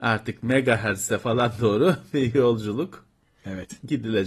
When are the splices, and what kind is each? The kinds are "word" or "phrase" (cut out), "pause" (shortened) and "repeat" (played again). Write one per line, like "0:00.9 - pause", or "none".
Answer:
none